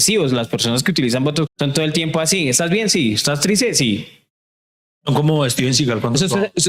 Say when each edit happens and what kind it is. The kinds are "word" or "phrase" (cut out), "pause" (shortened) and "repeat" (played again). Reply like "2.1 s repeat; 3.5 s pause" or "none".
1.5 s word